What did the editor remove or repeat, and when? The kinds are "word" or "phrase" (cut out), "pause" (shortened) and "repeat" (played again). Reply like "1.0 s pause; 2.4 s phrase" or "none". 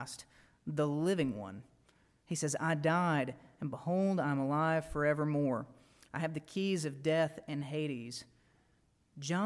none